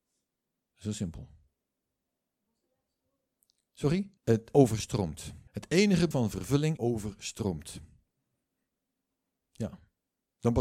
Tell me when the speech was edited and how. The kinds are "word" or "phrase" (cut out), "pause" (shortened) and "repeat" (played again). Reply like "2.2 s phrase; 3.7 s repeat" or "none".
4.2 s pause; 5.5 s pause; 6.1 s word; 6.8 s phrase

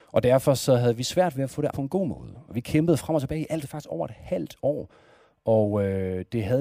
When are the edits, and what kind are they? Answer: 1.7 s word; 3.6 s phrase

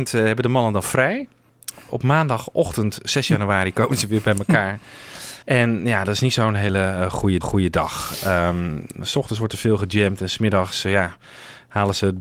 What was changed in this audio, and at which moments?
5.4 s pause; 7.4 s repeat

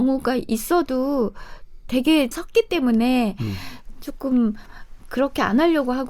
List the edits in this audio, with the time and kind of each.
2.3 s word

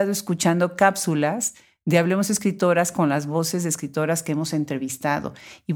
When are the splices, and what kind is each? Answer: none

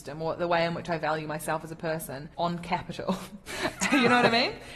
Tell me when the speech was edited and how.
2.3 s pause

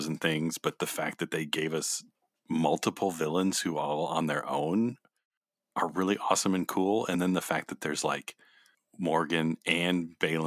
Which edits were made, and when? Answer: none

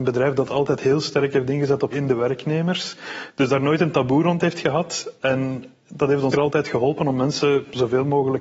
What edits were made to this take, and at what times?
1.9 s word; 6.3 s word

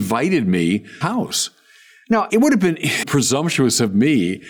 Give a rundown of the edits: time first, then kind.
1.0 s phrase; 2.3 s word; 3.0 s word

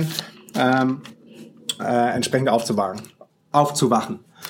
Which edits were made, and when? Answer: 1.8 s word

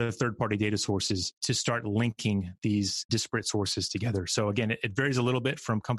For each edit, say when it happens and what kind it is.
1.4 s pause

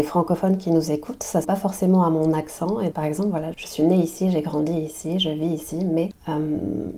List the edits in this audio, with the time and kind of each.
1.4 s word; 2.9 s word; 3.5 s word

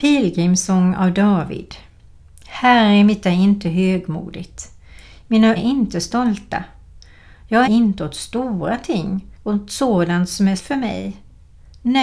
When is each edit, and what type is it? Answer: 3.2 s word; 5.6 s word; 7.6 s phrase; 9.3 s pause; 10.6 s word

